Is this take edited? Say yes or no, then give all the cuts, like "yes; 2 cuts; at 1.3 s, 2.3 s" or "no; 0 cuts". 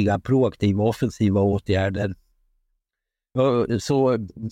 no; 0 cuts